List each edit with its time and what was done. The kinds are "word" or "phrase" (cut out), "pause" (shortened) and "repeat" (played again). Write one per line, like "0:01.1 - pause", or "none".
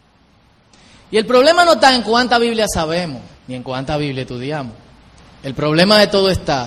0:03.4 - pause